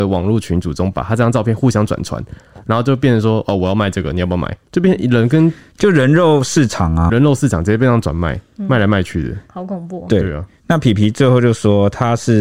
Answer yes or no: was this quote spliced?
yes